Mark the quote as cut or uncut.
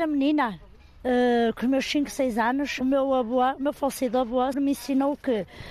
cut